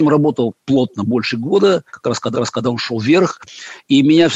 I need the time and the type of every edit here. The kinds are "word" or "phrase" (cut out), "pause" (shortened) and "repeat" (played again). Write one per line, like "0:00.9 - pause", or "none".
0:01.9 - pause
0:02.3 - repeat